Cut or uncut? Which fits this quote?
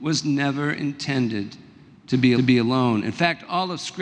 cut